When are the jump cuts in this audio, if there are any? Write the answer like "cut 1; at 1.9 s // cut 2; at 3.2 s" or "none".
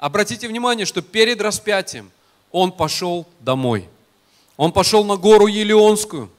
none

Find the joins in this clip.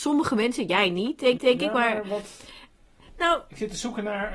cut 1; at 1.4 s

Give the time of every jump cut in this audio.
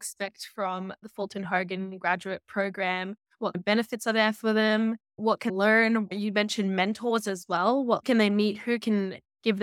cut 1; at 3.5 s // cut 2; at 5.1 s // cut 3; at 5.5 s // cut 4; at 8.0 s

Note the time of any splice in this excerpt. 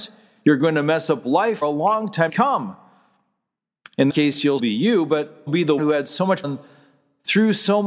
cut 1; at 1.6 s // cut 2; at 2.3 s // cut 3; at 4.1 s // cut 4; at 4.6 s // cut 5; at 5.5 s // cut 6; at 5.8 s // cut 7; at 6.4 s

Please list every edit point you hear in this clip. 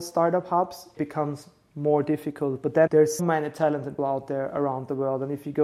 cut 1; at 1.0 s // cut 2; at 2.9 s // cut 3; at 3.2 s // cut 4; at 4.0 s

